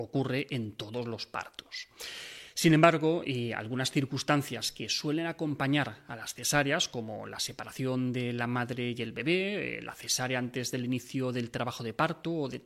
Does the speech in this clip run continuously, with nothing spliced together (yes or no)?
yes